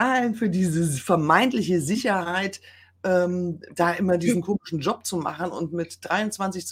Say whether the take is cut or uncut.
uncut